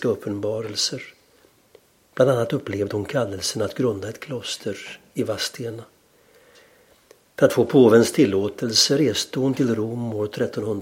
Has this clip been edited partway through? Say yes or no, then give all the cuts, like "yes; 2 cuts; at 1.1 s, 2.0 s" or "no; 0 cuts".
no; 0 cuts